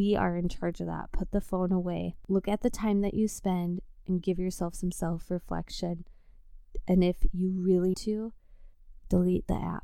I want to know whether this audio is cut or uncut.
cut